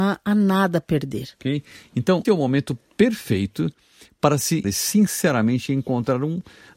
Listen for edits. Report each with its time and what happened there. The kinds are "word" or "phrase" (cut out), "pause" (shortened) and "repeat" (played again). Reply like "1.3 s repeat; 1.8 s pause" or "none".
2.2 s word; 4.6 s word